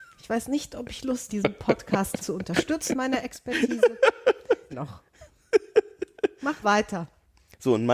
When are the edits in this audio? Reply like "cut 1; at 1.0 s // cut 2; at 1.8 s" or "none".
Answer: cut 1; at 1.3 s // cut 2; at 2.2 s // cut 3; at 2.9 s // cut 4; at 4.7 s // cut 5; at 6.6 s